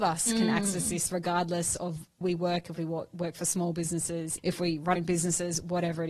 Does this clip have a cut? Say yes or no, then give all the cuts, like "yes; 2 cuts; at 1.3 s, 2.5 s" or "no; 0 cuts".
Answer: yes; 3 cuts; at 2.2 s, 4.4 s, 5.0 s